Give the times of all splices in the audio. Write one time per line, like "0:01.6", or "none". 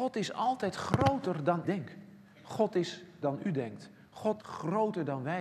0:01.6
0:03.2
0:04.4

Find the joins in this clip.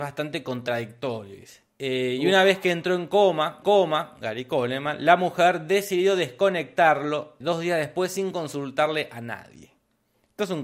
0:01.7
0:03.6
0:07.4

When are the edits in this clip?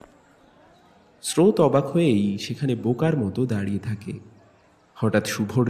none

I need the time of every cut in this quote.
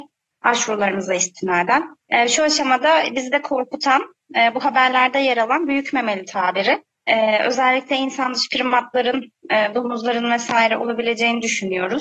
0:02.0
0:06.9

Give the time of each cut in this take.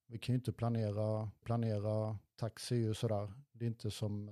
0:01.4

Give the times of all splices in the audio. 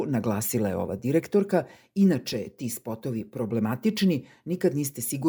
none

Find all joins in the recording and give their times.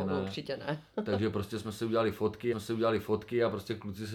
0:02.5

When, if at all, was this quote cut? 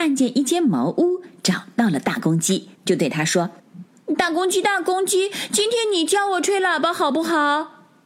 0:02.7
0:03.6

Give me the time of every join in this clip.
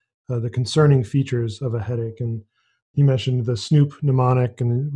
none

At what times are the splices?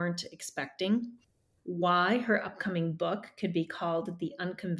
none

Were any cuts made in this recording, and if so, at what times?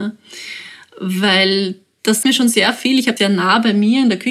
0:02.2
0:03.2

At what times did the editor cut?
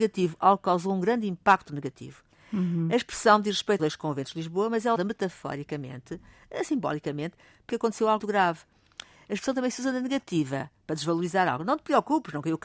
0:03.8
0:05.0
0:07.7
0:08.2

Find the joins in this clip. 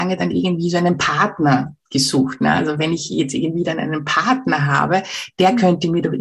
none

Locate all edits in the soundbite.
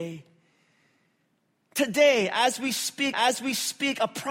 0:03.1

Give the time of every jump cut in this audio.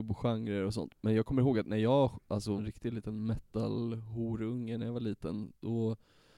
0:02.6

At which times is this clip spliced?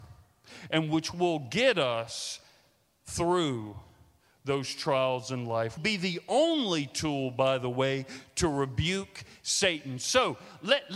0:05.8

